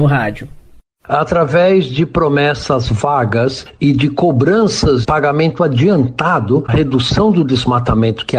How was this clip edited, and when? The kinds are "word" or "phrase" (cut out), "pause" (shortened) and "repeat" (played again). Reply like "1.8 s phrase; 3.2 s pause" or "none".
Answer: 5.0 s word; 6.7 s word